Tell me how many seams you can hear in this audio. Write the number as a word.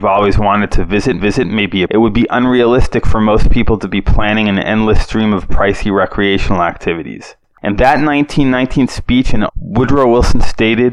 three